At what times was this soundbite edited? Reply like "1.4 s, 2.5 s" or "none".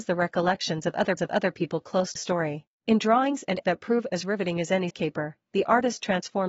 1.2 s, 2.2 s, 2.7 s, 3.6 s, 4.9 s